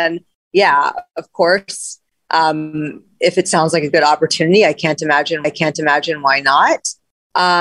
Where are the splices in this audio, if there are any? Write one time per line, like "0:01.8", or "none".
0:05.4